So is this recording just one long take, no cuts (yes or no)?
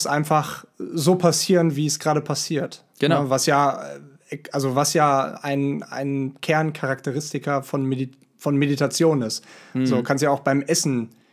yes